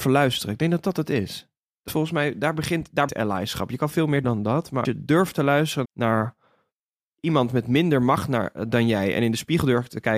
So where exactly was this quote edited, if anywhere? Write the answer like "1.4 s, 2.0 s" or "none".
1.9 s, 3.1 s, 4.2 s, 4.8 s, 5.8 s